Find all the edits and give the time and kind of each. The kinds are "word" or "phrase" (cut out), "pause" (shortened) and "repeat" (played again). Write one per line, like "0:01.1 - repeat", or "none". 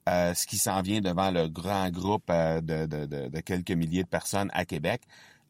none